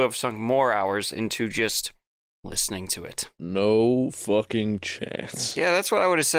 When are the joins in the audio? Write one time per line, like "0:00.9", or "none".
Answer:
none